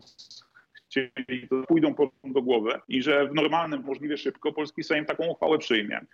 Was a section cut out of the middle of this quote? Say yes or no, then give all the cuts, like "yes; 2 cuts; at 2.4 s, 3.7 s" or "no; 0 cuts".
yes; 3 cuts; at 1.6 s, 2.8 s, 3.8 s